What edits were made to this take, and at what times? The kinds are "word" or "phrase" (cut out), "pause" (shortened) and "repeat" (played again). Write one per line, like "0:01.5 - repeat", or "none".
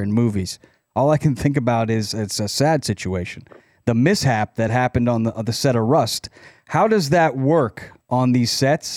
none

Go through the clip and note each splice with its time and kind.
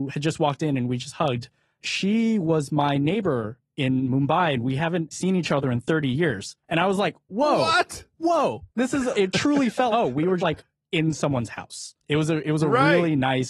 0:01.8 - word
0:05.1 - word
0:06.6 - pause
0:08.7 - pause
0:09.1 - word
0:09.9 - word
0:10.4 - word
0:12.0 - pause

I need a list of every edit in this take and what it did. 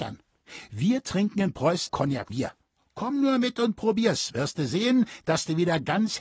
0:01.9 - word
0:02.3 - word

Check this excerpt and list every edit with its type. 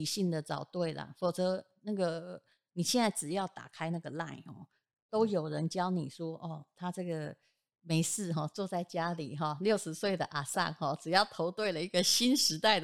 none

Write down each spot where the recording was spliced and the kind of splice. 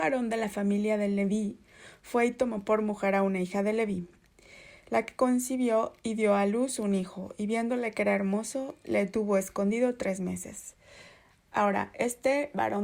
none

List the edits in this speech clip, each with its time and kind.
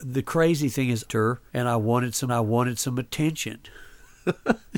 0:01.0 - phrase
0:01.5 - pause
0:02.3 - repeat

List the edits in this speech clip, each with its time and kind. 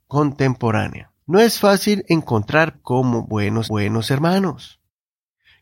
0:01.2 - pause
0:02.7 - phrase
0:03.6 - repeat

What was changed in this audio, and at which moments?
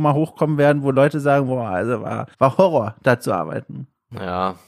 0:02.3 - pause

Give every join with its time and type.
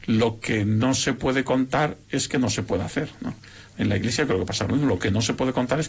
none

